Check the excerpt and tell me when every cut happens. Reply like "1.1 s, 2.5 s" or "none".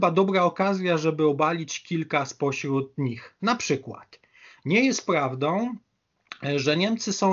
none